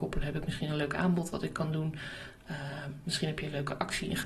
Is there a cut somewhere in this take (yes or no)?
no